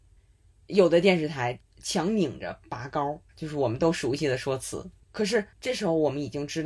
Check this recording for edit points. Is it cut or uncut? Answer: cut